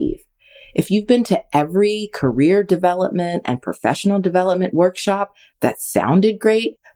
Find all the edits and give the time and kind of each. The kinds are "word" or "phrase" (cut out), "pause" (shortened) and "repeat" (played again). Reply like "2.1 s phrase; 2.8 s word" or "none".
none